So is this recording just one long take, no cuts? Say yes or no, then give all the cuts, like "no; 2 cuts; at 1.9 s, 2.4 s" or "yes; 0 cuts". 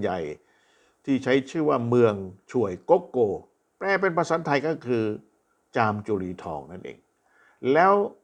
yes; 0 cuts